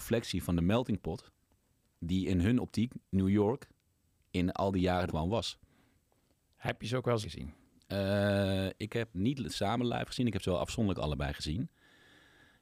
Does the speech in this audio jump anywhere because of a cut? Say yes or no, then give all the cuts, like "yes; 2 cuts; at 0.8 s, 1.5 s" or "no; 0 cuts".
yes; 3 cuts; at 5.1 s, 7.2 s, 9.1 s